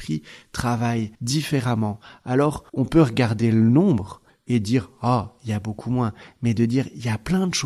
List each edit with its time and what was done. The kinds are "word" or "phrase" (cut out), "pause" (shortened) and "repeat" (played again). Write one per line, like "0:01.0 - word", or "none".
0:01.1 - pause
0:02.7 - pause

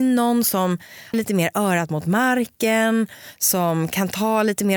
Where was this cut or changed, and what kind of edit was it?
0:01.1 - word

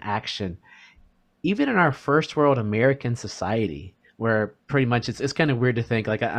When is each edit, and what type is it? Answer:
0:04.6 - pause

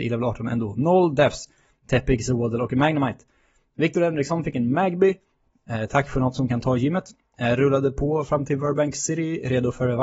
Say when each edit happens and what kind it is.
none

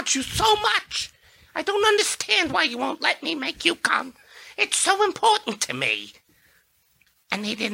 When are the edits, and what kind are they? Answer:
none

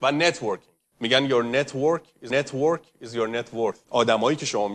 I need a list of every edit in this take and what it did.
0:02.3 - repeat
0:03.8 - word

